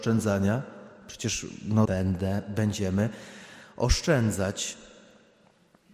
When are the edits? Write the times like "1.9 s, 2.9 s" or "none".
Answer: 1.8 s